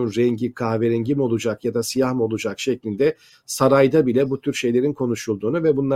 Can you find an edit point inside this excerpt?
no; 0 cuts

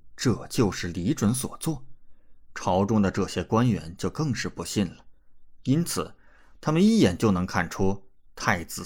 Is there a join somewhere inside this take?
no; 0 cuts

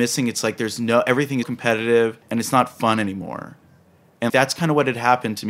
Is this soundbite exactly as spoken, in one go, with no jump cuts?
no; 3 cuts; at 1.4 s, 2.2 s, 4.3 s

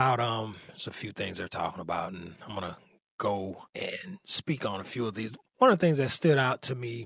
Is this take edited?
yes; 2 cuts; at 3.7 s, 5.5 s

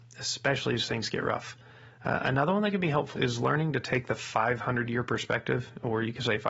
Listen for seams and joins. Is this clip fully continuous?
no; 1 cut; at 3.2 s

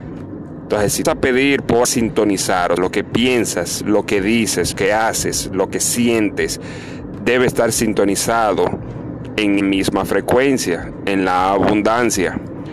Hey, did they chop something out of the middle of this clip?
yes; 5 cuts; at 1.0 s, 1.8 s, 2.8 s, 4.7 s, 9.6 s

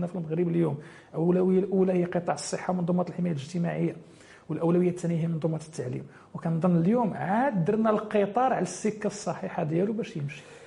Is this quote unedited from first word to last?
yes; 0 cuts

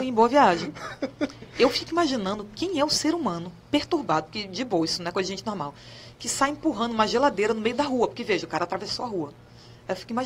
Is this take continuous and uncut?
yes; 0 cuts

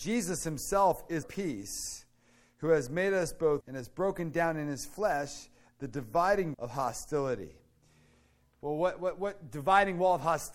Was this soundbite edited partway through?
yes; 3 cuts; at 1.2 s, 3.6 s, 6.5 s

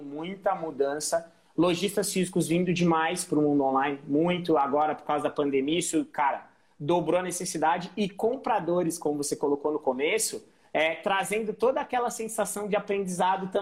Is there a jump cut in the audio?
no; 0 cuts

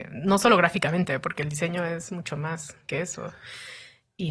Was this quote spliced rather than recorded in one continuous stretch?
no; 0 cuts

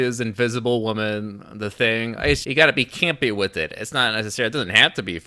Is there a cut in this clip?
yes; 1 cut; at 2.4 s

